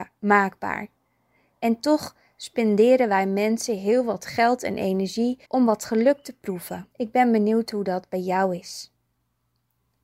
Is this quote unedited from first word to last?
no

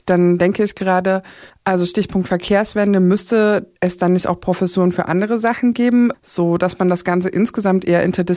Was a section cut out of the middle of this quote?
yes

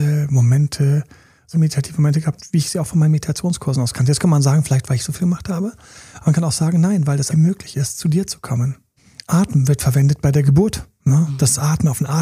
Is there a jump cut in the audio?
yes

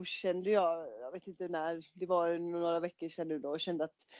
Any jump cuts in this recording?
no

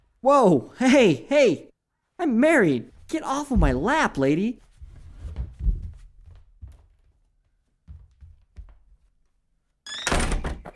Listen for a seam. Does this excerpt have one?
no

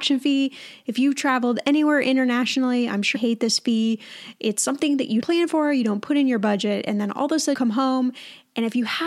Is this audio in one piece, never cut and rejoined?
no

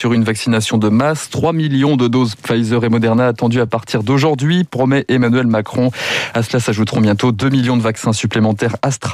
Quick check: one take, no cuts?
yes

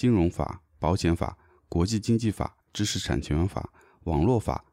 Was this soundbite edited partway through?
yes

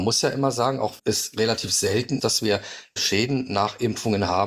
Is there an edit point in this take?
yes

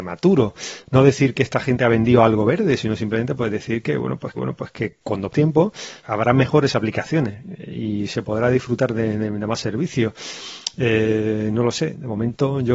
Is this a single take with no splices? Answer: no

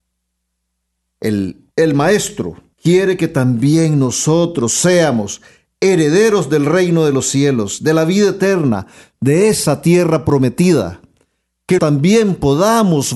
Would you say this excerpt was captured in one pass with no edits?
no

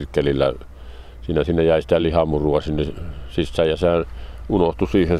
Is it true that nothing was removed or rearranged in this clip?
yes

